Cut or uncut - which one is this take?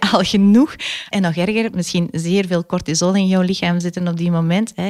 cut